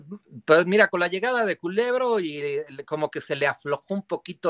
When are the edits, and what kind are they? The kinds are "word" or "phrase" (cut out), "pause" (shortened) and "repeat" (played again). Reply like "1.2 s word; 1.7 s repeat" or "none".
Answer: none